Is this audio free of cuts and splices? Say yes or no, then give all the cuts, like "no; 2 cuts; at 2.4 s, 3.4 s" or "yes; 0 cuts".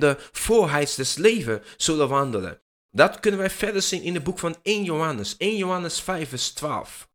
yes; 0 cuts